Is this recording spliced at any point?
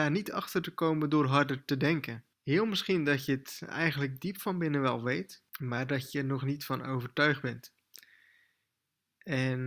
yes; 2 cuts; at 2.3 s, 5.5 s

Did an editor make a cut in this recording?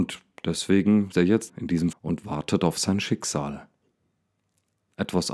yes; 3 cuts; at 1.1 s, 1.5 s, 1.9 s

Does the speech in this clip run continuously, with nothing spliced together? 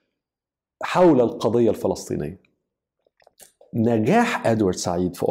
yes; 0 cuts

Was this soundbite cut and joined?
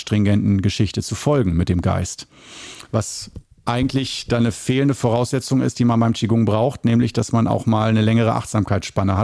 no; 0 cuts

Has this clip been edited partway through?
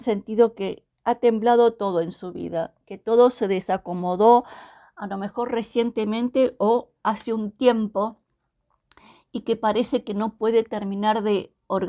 no; 0 cuts

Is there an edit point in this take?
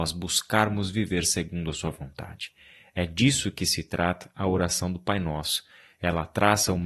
no; 0 cuts

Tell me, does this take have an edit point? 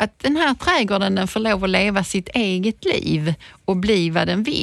no; 0 cuts

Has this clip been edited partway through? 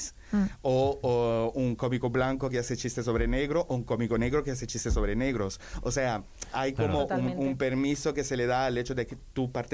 no; 0 cuts

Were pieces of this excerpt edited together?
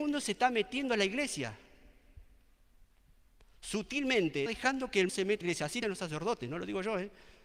yes; 4 cuts; at 4.5 s, 5.1 s, 5.4 s, 5.8 s

